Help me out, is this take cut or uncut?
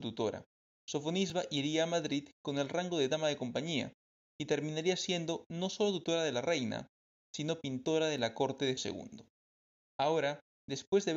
cut